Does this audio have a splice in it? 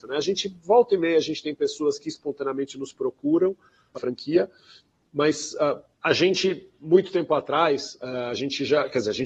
yes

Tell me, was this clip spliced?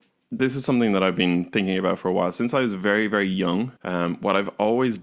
yes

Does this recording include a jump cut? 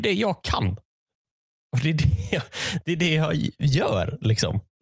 no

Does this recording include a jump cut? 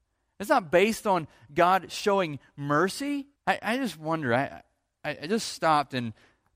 yes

